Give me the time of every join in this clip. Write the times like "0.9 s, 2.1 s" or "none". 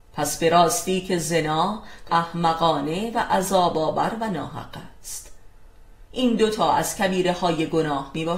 2.1 s